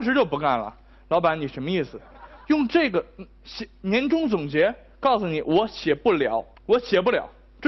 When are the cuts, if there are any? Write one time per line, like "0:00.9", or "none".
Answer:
0:06.5